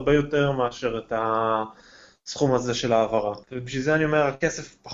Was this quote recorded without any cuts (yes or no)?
no